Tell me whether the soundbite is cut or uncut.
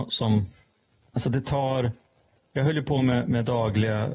uncut